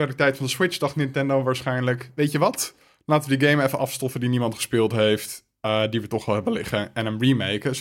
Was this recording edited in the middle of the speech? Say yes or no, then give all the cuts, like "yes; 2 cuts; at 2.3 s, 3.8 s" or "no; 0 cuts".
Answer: no; 0 cuts